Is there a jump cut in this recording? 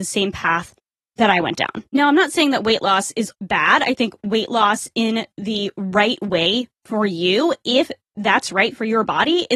yes; 3 cuts; at 1.9 s, 3.3 s, 6.8 s

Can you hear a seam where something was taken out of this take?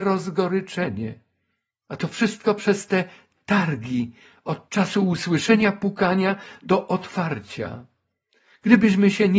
no; 0 cuts

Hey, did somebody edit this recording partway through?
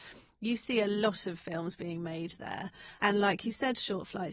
no; 0 cuts

